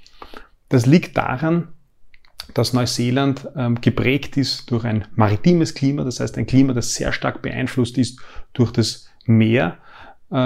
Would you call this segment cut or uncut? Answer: uncut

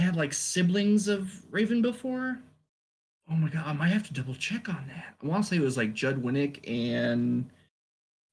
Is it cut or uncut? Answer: uncut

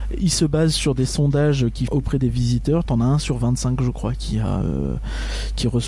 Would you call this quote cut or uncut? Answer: cut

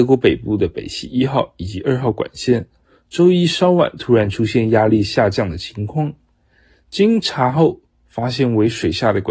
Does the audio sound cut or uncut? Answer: uncut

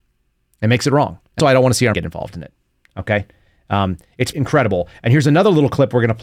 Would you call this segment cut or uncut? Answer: cut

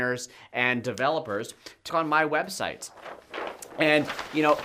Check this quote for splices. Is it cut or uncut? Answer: cut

